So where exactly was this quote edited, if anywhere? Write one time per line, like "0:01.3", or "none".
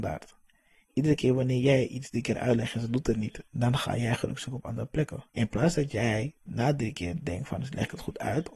0:05.3
0:06.4